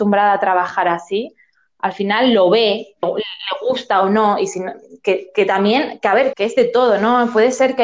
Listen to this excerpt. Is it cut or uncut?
cut